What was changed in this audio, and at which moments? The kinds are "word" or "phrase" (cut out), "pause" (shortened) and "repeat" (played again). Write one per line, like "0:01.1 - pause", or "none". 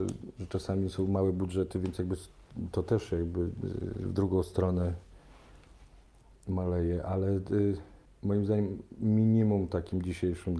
none